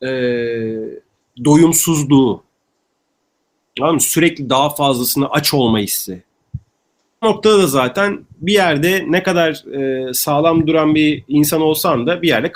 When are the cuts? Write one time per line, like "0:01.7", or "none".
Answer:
0:07.2